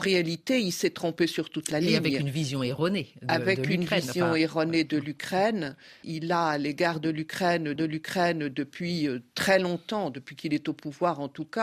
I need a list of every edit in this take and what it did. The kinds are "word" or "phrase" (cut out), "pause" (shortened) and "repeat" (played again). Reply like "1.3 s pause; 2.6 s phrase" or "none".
7.8 s repeat